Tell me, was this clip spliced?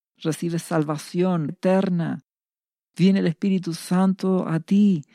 yes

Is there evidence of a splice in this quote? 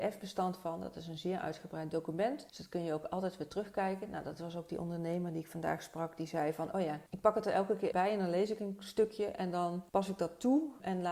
yes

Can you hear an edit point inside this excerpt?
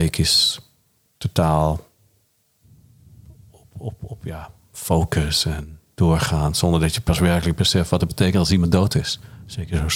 no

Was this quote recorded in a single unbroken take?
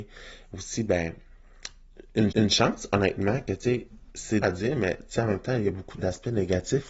no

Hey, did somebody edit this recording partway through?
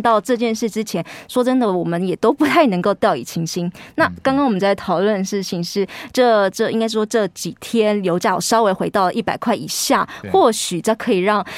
no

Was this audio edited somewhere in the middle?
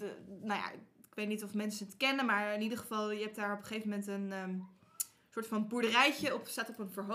no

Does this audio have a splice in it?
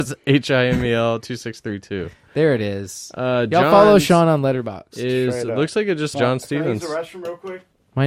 yes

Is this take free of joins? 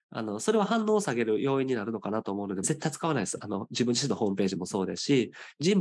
no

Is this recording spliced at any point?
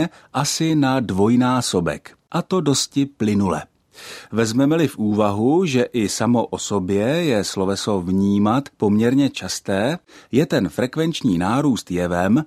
yes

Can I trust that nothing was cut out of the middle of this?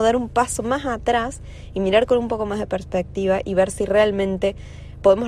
yes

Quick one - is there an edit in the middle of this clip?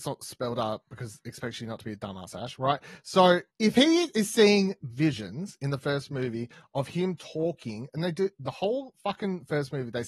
yes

